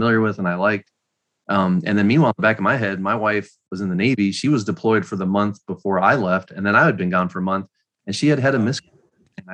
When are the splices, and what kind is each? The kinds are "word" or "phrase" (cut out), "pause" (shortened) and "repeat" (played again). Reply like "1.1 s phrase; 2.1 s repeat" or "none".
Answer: none